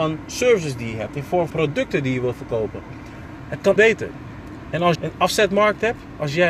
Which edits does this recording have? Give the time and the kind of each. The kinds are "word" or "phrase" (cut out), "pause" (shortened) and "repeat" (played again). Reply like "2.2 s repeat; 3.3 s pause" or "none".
1.5 s word; 3.8 s word; 4.9 s word